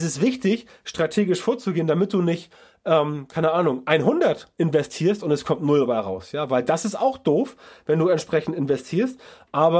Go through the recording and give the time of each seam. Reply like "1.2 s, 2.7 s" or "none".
none